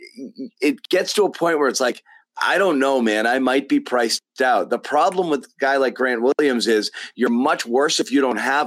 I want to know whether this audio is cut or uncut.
uncut